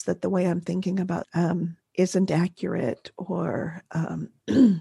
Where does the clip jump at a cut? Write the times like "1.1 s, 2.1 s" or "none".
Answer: 1.2 s, 1.8 s